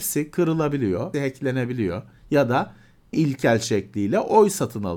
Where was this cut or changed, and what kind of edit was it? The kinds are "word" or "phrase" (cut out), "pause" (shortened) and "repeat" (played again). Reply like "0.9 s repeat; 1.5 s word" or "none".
1.1 s word; 3.1 s word